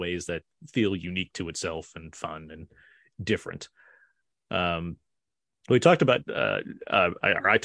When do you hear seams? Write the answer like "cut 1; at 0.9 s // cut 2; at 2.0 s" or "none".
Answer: none